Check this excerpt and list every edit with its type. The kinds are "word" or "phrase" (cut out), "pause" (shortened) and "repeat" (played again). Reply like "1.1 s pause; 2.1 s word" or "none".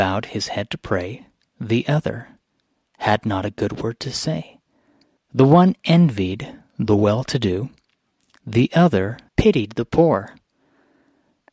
9.3 s pause